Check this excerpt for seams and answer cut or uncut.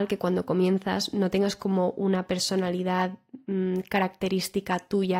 uncut